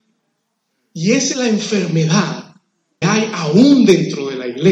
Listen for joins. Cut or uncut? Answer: cut